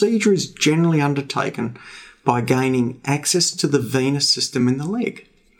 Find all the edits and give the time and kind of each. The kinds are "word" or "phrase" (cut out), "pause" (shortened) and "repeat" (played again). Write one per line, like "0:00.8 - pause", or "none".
none